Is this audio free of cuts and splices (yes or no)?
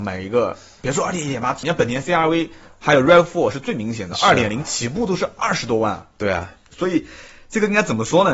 no